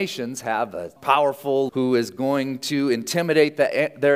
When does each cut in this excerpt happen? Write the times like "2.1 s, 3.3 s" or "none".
1.0 s, 1.7 s